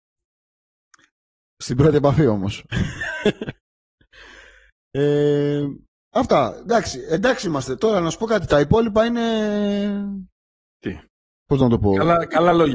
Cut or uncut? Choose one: uncut